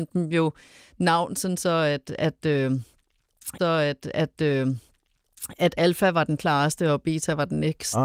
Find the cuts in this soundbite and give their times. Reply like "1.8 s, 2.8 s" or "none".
3.6 s